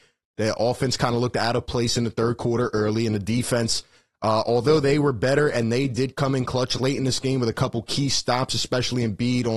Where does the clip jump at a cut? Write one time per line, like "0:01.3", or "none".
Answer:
none